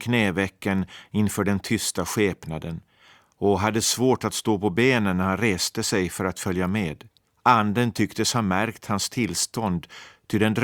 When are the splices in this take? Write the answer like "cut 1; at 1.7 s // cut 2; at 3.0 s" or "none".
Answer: cut 1; at 7.3 s